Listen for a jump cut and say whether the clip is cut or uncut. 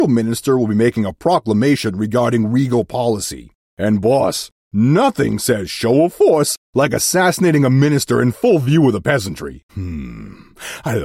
cut